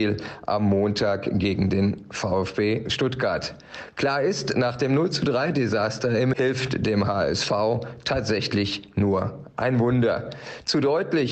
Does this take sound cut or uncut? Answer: cut